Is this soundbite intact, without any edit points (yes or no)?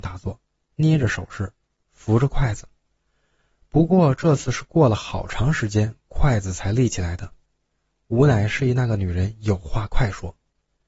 yes